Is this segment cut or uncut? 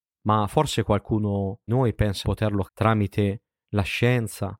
cut